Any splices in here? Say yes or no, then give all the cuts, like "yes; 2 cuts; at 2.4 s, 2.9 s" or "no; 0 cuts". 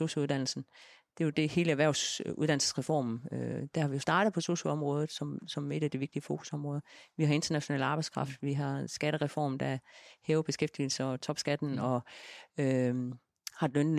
no; 0 cuts